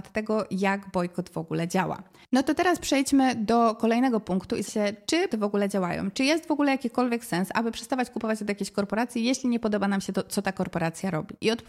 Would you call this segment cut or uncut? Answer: cut